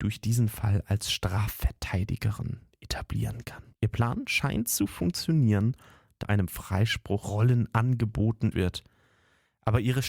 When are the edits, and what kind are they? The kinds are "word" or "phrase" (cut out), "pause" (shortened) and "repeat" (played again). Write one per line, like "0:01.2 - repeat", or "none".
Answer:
0:03.7 - pause
0:06.2 - phrase
0:07.2 - word
0:08.5 - word